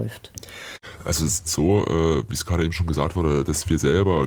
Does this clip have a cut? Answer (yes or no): yes